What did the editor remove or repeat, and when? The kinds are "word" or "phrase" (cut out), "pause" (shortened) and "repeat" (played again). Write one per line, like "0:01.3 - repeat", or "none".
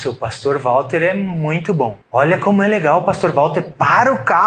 0:02.0 - pause

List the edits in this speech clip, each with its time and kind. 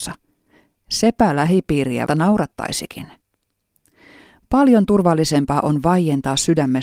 0:02.1 - word

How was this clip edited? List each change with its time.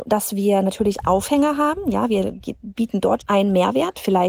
0:01.0 - word
0:03.2 - word

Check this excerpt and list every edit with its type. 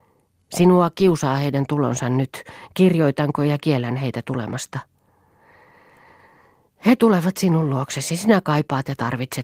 none

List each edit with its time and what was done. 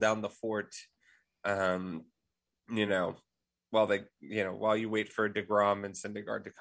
none

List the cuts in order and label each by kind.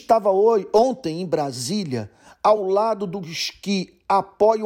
none

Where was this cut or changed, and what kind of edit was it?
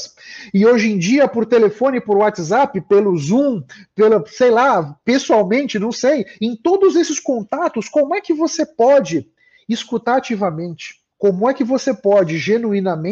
0:11.1 - pause

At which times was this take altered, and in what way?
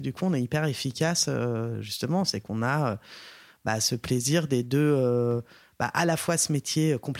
none

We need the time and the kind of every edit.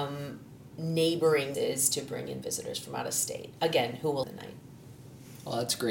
0:01.5 - phrase
0:04.2 - word

